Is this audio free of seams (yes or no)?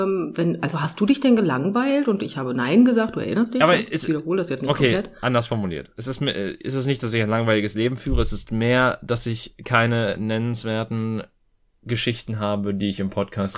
yes